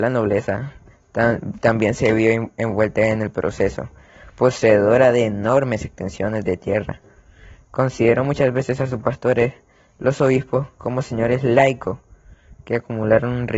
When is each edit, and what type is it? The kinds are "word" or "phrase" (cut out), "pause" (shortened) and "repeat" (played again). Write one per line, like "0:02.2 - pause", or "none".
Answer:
none